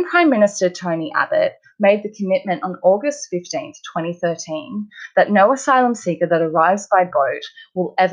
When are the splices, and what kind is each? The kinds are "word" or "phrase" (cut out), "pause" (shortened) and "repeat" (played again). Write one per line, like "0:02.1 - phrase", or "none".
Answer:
none